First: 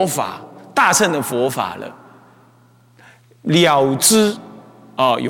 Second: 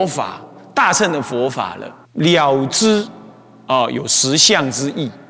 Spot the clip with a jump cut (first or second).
second